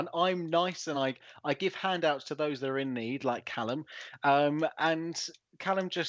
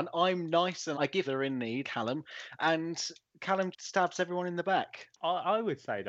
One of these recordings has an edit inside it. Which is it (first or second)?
second